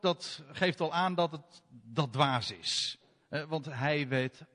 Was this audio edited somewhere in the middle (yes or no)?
no